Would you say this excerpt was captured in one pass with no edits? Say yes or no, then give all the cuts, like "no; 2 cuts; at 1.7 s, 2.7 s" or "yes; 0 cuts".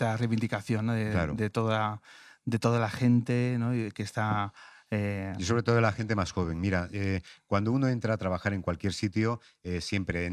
yes; 0 cuts